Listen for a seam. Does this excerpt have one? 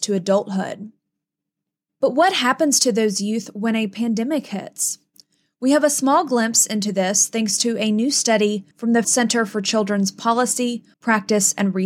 yes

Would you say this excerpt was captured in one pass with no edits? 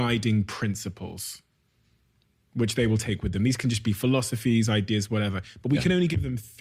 yes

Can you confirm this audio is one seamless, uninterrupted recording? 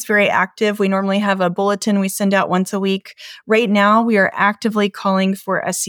yes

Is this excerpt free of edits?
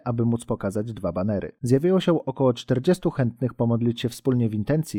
yes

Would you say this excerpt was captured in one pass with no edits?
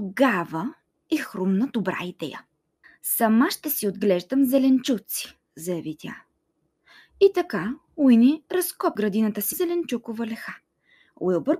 no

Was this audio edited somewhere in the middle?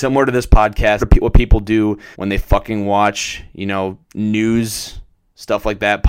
yes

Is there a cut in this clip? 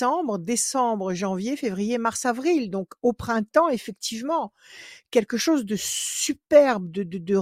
no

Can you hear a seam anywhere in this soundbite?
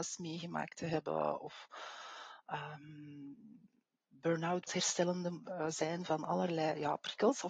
yes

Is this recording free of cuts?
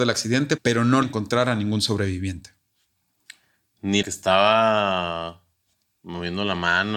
no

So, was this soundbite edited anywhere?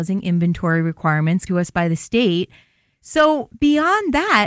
yes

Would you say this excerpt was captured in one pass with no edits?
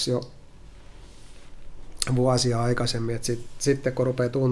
yes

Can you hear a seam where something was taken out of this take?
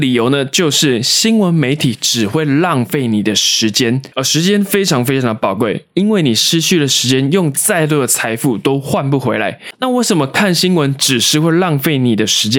yes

